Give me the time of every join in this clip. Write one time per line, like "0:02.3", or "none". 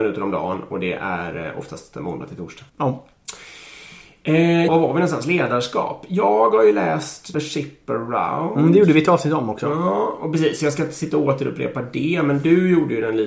0:02.7
0:04.7
0:07.3